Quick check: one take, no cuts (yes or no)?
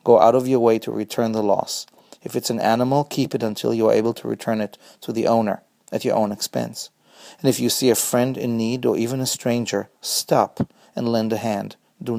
yes